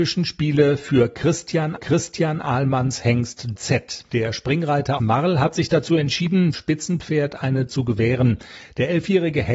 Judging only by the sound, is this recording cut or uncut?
cut